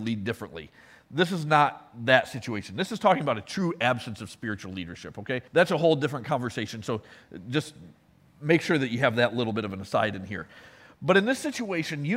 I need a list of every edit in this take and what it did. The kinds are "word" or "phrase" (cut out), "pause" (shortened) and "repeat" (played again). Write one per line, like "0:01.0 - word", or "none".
0:05.5 - pause